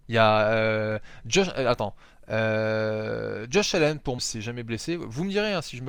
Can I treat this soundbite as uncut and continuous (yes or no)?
no